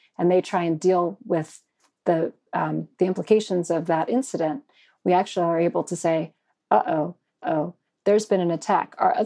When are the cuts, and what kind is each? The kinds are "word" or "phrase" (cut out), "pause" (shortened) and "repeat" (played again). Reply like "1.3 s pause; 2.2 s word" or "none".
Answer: 7.4 s repeat